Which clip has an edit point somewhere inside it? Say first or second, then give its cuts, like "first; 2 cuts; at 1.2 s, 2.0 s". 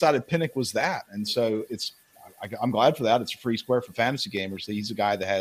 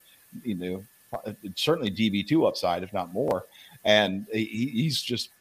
first; 1 cut; at 1.7 s